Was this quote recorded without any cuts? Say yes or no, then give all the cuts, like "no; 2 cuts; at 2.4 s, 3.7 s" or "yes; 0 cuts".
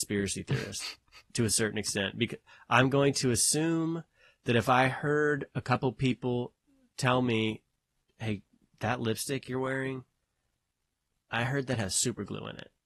yes; 0 cuts